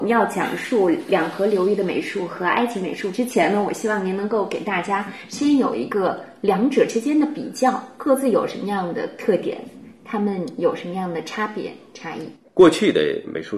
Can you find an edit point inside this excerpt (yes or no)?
no